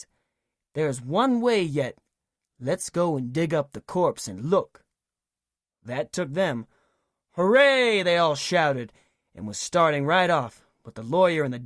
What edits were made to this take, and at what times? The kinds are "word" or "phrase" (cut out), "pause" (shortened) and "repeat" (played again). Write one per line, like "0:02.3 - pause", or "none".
none